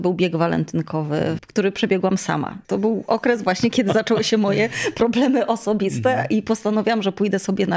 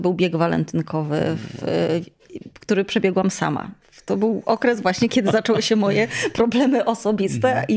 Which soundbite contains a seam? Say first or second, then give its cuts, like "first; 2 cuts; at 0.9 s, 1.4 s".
first; 2 cuts; at 1.4 s, 2.6 s